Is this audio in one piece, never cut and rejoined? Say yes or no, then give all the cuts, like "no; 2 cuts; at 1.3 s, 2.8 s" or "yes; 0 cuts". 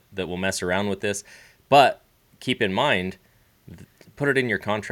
yes; 0 cuts